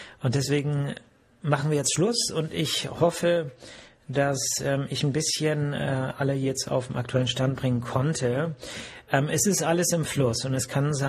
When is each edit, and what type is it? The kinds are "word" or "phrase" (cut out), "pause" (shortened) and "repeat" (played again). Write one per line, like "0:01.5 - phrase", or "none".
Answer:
none